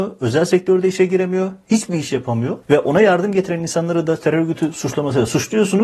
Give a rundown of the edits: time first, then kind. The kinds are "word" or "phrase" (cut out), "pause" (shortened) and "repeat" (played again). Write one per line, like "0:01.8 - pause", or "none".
0:02.6 - pause

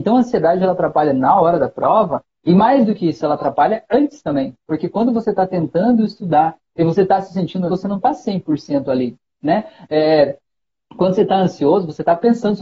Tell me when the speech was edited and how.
0:07.7 - word

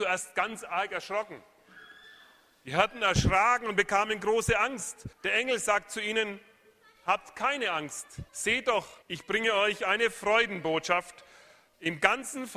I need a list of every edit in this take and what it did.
0:05.1 - pause
0:08.3 - pause
0:09.0 - pause

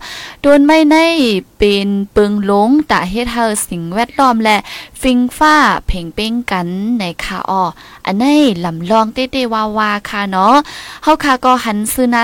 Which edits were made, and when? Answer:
none

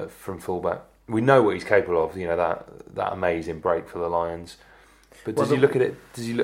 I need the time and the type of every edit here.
none

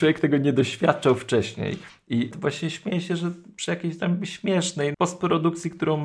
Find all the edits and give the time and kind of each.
0:02.3 - word
0:04.9 - word

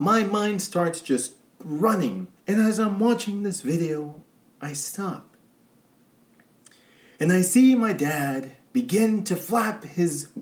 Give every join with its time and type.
0:02.4 - pause

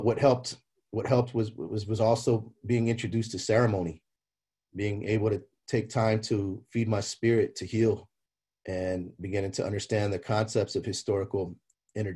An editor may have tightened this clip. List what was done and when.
none

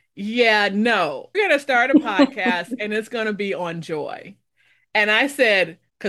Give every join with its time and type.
0:01.3 - word

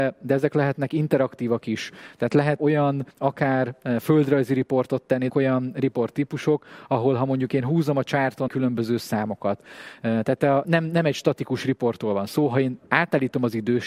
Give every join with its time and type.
0:02.6 - word
0:03.1 - pause
0:05.3 - word
0:08.5 - phrase
0:10.6 - word

